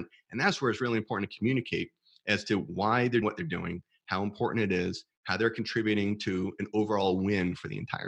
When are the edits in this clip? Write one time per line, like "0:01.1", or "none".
0:03.2